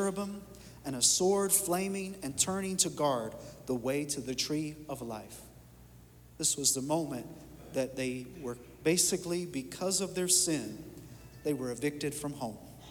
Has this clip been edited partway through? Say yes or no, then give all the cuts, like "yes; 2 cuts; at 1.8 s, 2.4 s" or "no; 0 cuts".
no; 0 cuts